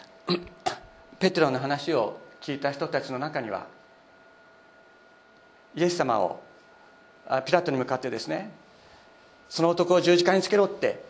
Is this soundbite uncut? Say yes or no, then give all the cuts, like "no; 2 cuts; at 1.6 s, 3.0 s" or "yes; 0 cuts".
yes; 0 cuts